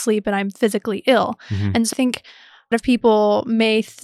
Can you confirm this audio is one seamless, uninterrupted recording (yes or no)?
no